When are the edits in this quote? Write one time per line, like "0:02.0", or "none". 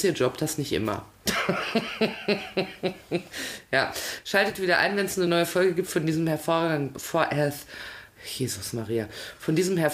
none